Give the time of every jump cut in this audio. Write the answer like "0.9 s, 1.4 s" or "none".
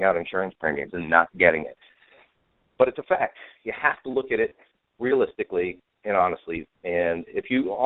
none